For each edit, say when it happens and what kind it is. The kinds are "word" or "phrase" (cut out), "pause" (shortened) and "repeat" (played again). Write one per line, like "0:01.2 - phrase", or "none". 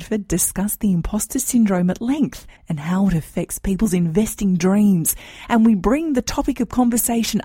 0:02.6 - pause